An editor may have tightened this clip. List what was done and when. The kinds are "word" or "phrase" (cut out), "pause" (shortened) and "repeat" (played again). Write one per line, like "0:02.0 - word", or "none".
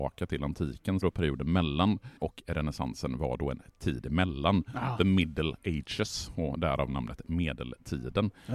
0:01.0 - phrase
0:02.2 - word